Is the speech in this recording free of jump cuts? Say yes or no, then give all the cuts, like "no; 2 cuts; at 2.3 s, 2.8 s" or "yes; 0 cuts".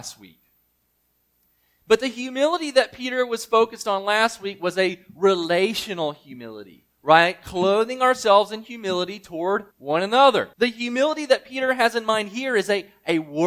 no; 3 cuts; at 6.9 s, 9.7 s, 10.5 s